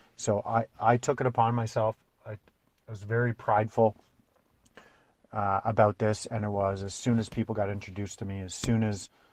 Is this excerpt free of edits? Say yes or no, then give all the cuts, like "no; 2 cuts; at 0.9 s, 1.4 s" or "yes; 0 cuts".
yes; 0 cuts